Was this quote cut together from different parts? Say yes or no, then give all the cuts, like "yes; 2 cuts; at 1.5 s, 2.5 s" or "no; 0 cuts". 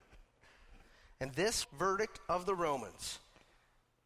yes; 1 cut; at 1.6 s